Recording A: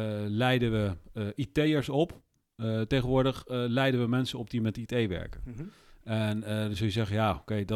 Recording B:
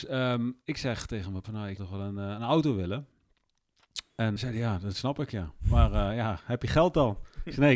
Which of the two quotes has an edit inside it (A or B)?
B